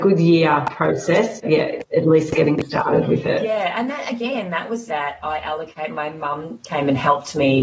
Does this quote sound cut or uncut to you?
cut